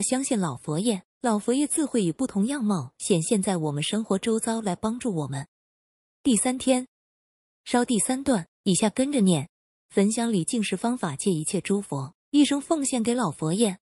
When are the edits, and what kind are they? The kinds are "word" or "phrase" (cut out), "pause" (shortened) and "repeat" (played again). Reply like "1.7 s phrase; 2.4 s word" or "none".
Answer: 9.6 s pause